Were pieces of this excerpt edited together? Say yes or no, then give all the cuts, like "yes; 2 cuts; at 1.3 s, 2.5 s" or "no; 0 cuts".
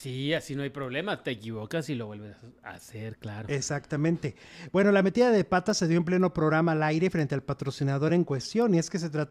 no; 0 cuts